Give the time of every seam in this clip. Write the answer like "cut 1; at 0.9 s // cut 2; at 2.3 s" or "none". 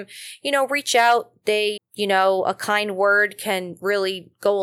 cut 1; at 1.8 s